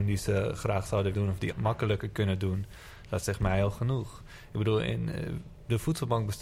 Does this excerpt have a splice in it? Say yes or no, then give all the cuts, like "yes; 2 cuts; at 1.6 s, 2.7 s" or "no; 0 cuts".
yes; 2 cuts; at 1.1 s, 1.5 s